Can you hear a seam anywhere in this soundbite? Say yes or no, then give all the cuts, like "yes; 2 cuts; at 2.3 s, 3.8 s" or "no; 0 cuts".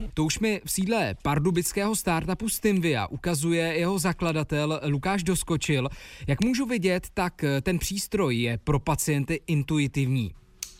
no; 0 cuts